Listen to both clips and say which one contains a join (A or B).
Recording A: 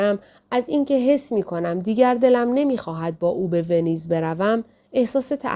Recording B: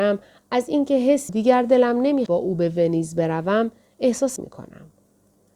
B